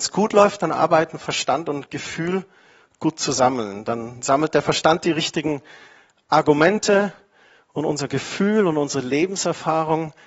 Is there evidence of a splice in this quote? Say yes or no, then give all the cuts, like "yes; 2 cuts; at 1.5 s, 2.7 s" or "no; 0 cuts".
no; 0 cuts